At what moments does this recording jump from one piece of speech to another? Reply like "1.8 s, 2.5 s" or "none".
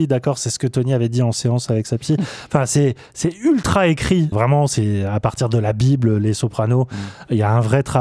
4.3 s